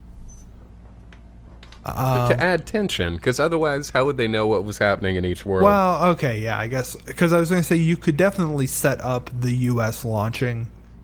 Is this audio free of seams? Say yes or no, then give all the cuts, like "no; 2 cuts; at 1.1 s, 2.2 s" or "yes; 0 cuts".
yes; 0 cuts